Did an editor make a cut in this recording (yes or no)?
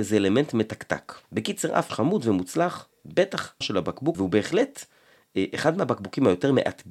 yes